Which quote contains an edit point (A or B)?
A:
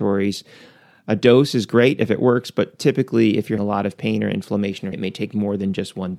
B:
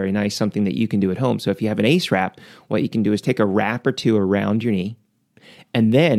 A